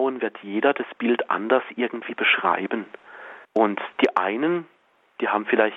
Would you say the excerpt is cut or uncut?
cut